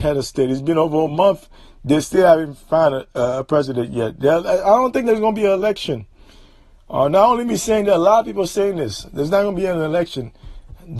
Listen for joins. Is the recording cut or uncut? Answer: uncut